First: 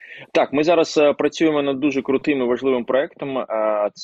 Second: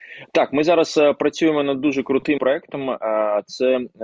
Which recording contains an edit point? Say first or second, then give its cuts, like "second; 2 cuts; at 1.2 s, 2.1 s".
second; 1 cut; at 2.4 s